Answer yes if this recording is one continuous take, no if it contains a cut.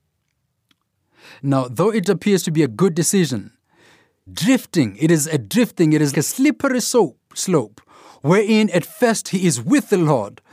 no